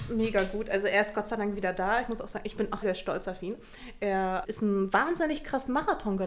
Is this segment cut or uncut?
cut